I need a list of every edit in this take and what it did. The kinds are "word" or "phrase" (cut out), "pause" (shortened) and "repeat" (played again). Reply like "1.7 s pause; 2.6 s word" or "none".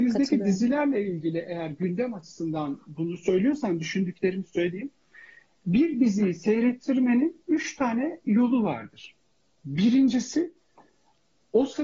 none

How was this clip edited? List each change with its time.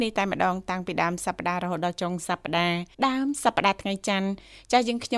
2.9 s pause

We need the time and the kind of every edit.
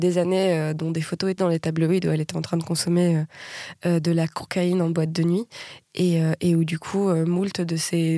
1.4 s word

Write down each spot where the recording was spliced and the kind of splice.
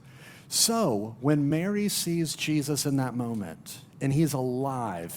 none

